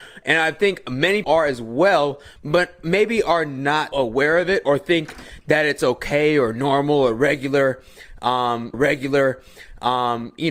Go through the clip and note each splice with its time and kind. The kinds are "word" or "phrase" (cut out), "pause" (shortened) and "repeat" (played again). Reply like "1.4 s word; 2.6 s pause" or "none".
1.2 s word; 3.9 s word; 8.7 s repeat